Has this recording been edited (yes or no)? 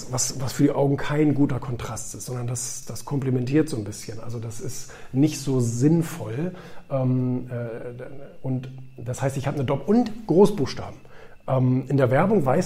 yes